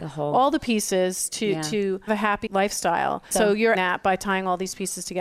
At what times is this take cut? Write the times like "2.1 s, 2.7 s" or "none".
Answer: 2.1 s, 2.5 s, 3.3 s, 3.7 s